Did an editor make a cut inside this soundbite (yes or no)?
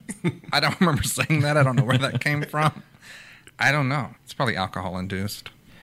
yes